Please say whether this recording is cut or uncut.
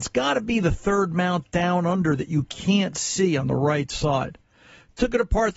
uncut